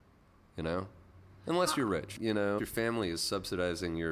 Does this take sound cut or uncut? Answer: cut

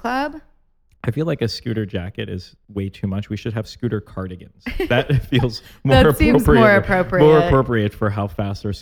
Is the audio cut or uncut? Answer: uncut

